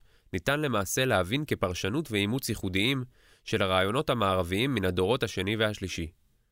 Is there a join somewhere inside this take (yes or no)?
no